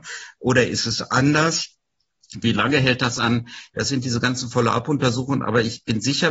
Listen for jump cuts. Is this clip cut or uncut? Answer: uncut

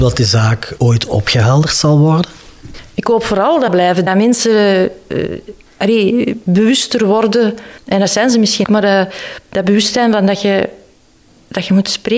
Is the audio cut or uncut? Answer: cut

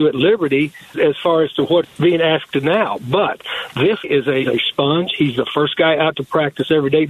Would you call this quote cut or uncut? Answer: cut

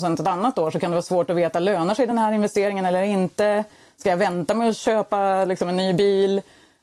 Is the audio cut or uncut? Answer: uncut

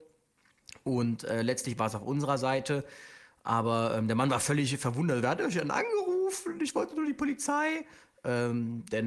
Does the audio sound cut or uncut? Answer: uncut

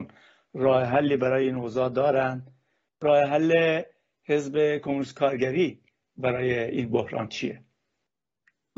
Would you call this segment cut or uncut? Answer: uncut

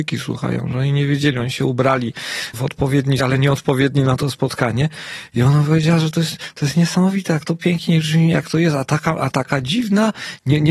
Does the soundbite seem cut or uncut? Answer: cut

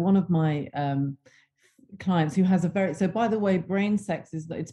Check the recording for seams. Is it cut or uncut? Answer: uncut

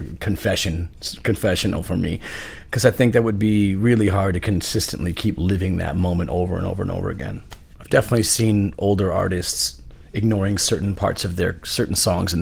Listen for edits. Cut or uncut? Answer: uncut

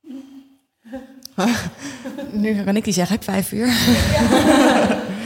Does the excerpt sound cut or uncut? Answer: cut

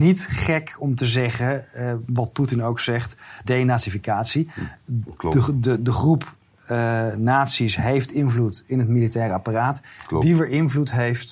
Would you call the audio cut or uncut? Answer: cut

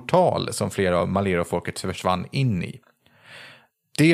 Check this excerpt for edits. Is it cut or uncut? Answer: uncut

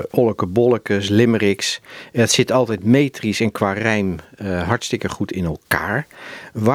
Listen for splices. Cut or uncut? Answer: uncut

